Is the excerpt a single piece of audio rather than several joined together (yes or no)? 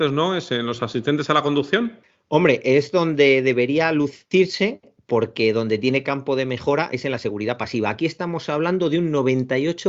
yes